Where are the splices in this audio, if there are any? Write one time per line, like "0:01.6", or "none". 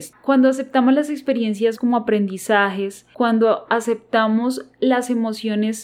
0:01.8